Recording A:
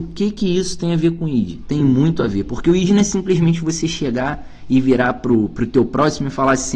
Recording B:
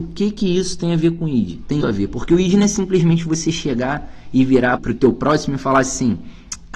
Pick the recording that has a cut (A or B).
B